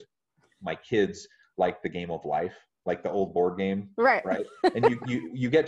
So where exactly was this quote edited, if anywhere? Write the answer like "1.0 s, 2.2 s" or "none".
none